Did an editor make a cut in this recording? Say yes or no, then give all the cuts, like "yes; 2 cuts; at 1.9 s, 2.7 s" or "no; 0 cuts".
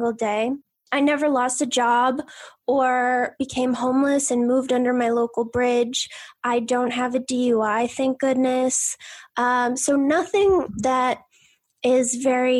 no; 0 cuts